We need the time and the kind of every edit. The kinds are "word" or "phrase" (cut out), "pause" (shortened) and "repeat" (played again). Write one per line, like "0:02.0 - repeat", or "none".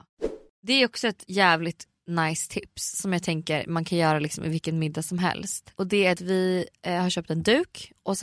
none